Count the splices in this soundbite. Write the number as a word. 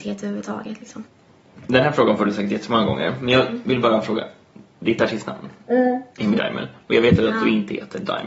two